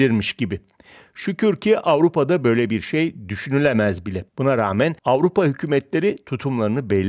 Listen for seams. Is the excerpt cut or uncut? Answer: cut